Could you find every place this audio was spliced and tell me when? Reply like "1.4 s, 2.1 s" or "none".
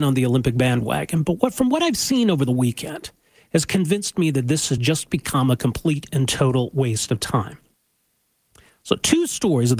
none